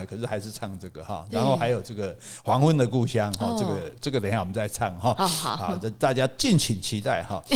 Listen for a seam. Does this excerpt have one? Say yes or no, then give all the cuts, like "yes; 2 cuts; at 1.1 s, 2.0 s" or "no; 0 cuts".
no; 0 cuts